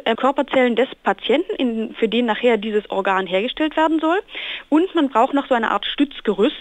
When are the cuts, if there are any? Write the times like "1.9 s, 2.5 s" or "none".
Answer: 1.0 s

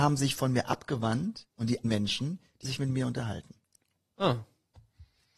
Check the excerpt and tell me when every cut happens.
1.5 s, 1.8 s, 2.6 s

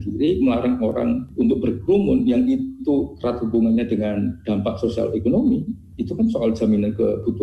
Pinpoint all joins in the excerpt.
none

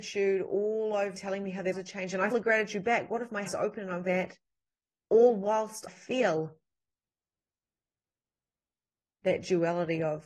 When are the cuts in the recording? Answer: 1.2 s, 1.7 s, 2.3 s, 3.5 s, 4.1 s, 5.9 s

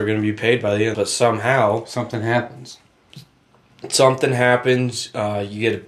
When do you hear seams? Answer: 0.9 s

